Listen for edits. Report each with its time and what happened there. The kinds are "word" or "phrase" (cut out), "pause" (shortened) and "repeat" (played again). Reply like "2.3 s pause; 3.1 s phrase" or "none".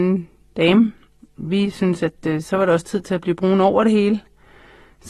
none